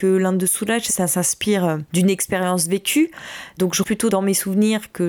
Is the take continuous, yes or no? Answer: no